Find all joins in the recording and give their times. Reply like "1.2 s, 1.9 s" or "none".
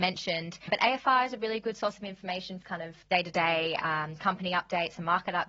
2.6 s, 3.0 s